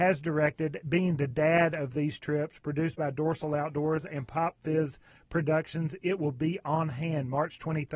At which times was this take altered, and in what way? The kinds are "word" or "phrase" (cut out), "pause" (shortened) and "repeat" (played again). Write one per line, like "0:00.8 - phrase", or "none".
none